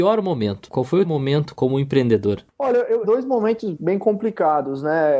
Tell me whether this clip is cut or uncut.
cut